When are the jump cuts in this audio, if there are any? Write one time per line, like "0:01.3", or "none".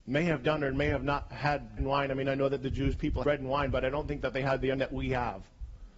0:01.8
0:03.2
0:04.7